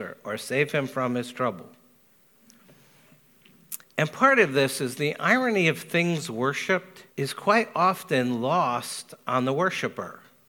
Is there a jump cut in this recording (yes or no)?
yes